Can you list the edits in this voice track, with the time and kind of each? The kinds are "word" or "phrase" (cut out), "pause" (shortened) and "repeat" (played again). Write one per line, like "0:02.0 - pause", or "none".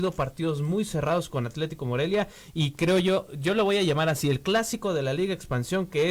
none